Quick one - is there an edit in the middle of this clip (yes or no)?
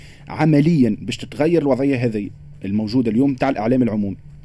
no